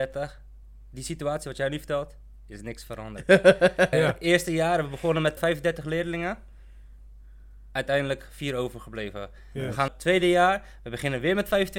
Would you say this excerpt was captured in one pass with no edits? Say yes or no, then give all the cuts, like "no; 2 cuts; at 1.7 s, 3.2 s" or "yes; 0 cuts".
no; 3 cuts; at 3.9 s, 5.4 s, 9.9 s